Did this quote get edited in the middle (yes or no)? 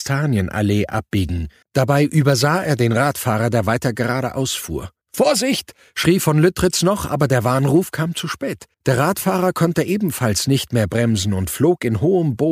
yes